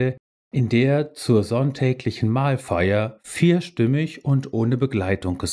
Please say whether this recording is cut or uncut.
uncut